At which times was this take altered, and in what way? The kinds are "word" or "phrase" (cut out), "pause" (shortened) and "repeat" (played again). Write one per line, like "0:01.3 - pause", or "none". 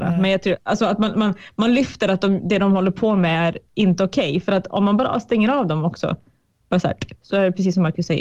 none